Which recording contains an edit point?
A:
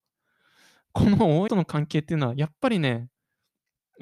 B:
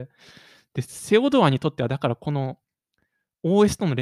A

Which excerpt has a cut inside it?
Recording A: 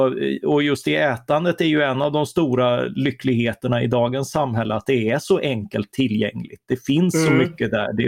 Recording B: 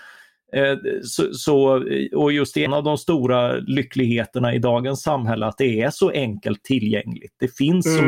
B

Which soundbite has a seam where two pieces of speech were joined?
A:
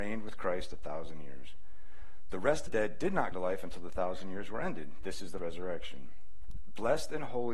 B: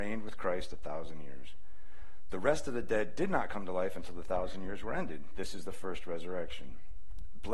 A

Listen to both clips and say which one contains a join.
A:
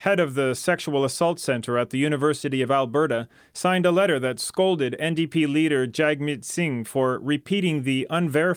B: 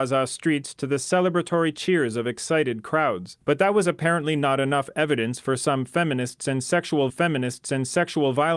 B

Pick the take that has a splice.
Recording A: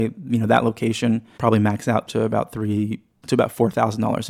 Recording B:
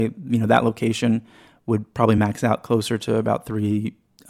A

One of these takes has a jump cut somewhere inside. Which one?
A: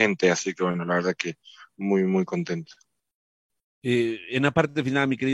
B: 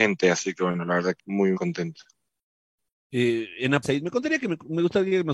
B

